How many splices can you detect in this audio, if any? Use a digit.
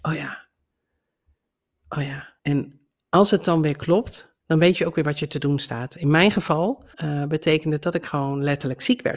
3